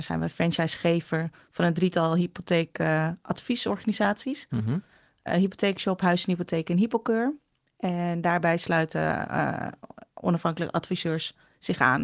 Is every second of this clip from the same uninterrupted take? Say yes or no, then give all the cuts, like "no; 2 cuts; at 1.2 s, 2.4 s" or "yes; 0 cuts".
yes; 0 cuts